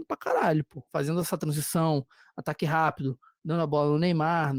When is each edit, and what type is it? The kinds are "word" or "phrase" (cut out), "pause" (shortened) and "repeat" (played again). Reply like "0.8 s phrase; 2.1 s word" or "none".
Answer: none